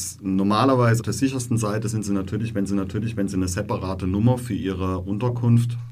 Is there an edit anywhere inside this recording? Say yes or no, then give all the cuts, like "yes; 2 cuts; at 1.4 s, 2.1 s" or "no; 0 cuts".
yes; 2 cuts; at 1.0 s, 2.7 s